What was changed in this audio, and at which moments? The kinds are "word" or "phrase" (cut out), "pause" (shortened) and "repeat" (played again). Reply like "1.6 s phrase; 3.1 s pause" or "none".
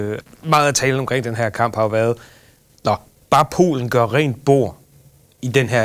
none